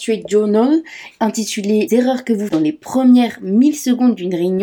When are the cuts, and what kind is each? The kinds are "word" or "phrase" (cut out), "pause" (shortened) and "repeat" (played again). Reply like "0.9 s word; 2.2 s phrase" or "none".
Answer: 1.9 s word; 2.5 s word